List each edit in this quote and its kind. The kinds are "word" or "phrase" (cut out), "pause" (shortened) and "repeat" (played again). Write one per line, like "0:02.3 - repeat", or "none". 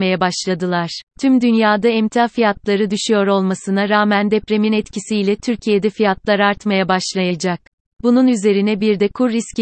0:01.1 - pause
0:07.7 - pause